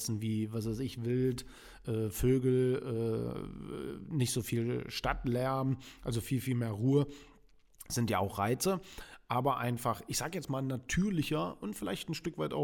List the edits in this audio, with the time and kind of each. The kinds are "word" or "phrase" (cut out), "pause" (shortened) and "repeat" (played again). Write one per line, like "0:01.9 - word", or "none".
0:01.8 - word

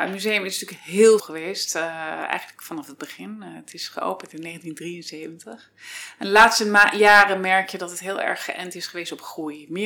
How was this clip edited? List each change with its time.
0:01.2 - word

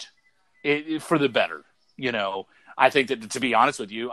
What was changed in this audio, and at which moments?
none

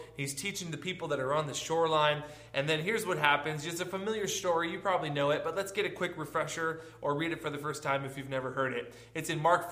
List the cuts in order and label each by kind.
none

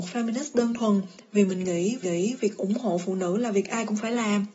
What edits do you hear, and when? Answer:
0:02.0 - repeat

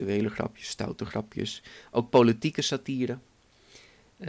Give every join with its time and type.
none

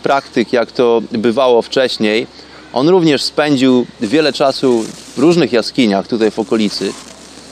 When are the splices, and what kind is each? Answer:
none

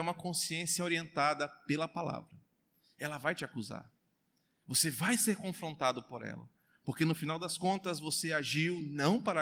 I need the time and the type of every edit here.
none

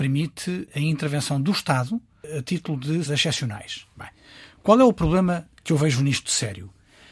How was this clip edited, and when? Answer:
0:03.1 - word

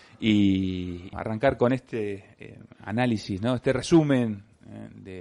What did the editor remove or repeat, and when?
0:01.1 - word

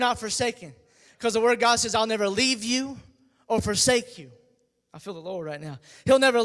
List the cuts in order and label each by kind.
none

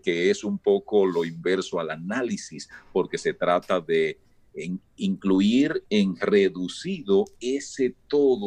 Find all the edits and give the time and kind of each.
none

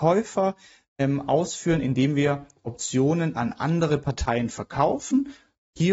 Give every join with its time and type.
none

